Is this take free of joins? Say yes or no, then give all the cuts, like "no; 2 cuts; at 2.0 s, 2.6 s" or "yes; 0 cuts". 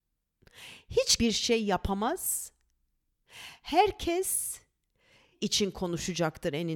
no; 2 cuts; at 1.2 s, 5.3 s